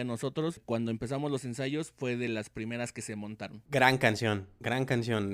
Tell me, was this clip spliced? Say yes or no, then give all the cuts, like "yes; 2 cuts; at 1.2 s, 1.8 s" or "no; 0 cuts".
no; 0 cuts